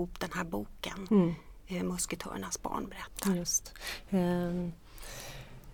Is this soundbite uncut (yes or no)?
yes